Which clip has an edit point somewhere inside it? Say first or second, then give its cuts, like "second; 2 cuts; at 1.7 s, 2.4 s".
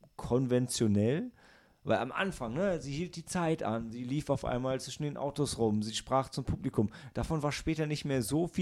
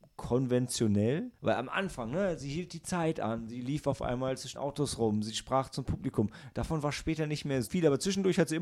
second; 3 cuts; at 1.4 s, 4.5 s, 7.6 s